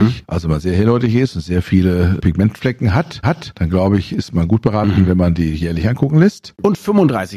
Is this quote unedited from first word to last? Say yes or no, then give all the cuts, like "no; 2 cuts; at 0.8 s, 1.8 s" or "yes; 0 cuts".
no; 1 cut; at 3.2 s